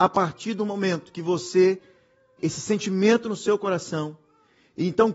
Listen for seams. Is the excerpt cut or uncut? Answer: cut